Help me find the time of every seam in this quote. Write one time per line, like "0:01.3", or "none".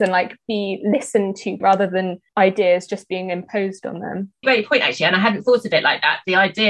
0:01.6
0:02.3
0:04.4